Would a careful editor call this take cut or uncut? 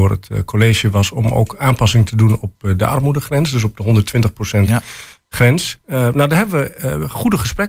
uncut